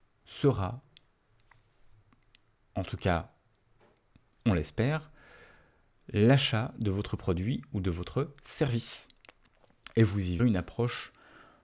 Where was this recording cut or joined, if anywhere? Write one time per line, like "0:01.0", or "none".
0:10.4